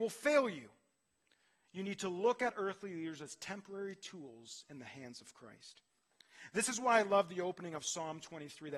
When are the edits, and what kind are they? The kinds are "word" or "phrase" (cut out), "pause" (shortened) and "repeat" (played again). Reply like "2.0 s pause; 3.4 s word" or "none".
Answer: none